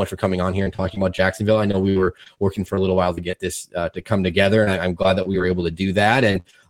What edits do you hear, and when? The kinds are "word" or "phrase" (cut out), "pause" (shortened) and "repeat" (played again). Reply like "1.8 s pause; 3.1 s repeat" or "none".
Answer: none